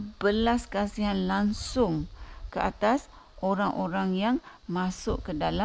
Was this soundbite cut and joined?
no; 0 cuts

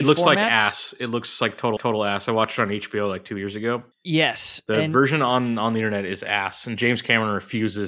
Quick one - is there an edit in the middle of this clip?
yes; 2 cuts; at 1.8 s, 3.9 s

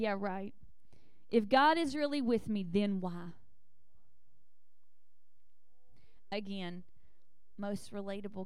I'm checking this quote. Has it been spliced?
no; 0 cuts

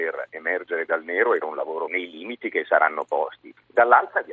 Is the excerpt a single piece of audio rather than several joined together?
no; 2 cuts; at 1.4 s, 1.9 s

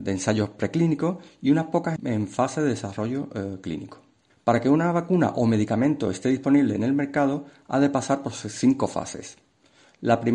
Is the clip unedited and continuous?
no; 2 cuts; at 2.0 s, 4.3 s

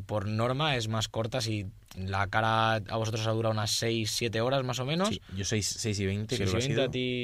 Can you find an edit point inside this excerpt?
no; 0 cuts

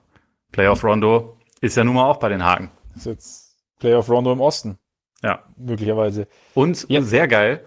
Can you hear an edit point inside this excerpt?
no; 0 cuts

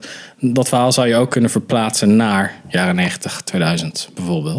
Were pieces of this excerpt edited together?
no; 0 cuts

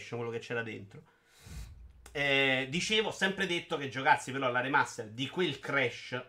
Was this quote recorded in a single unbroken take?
yes; 0 cuts

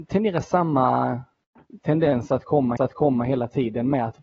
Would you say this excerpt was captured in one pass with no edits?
no; 1 cut; at 2.8 s

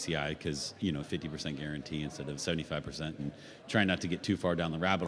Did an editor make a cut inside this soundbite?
yes; 3 cuts; at 1.0 s, 2.4 s, 3.2 s

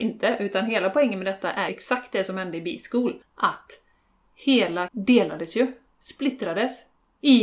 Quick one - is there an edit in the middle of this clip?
yes; 3 cuts; at 1.7 s, 3.2 s, 4.9 s

